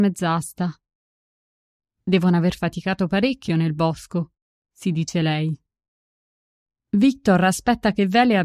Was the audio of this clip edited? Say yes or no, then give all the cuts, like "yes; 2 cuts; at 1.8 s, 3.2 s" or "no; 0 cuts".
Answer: no; 0 cuts